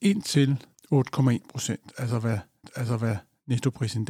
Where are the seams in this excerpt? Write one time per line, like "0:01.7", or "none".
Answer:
0:02.6